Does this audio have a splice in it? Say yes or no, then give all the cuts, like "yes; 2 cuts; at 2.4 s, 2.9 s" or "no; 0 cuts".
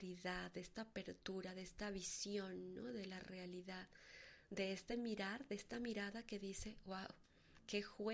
no; 0 cuts